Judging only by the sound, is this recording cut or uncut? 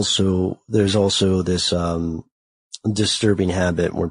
uncut